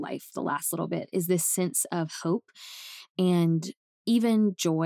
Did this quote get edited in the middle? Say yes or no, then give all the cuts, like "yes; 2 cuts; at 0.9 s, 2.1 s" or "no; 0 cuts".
no; 0 cuts